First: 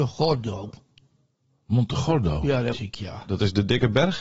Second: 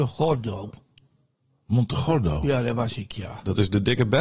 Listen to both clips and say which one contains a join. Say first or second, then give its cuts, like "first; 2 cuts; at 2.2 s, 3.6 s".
first; 1 cut; at 2.7 s